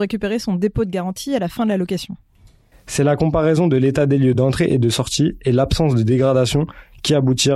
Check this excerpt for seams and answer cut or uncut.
uncut